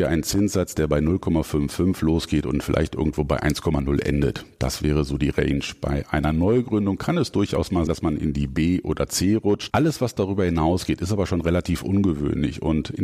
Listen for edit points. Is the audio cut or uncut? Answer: cut